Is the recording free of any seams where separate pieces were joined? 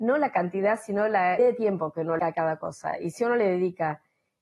no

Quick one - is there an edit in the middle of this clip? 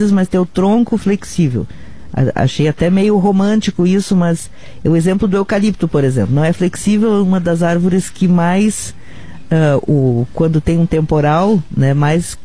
no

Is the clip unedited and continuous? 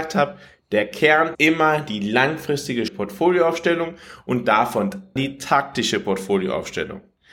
no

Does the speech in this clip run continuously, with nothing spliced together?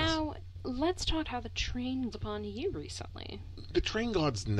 no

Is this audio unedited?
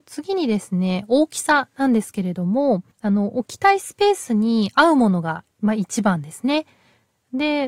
no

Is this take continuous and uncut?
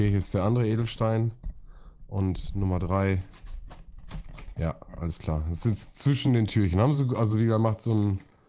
yes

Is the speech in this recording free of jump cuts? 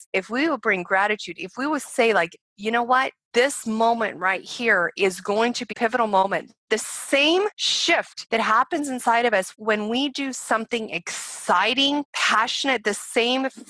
no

